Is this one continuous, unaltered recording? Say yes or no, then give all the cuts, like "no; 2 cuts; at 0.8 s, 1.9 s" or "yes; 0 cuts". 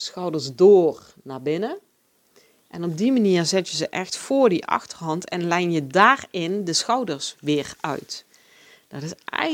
yes; 0 cuts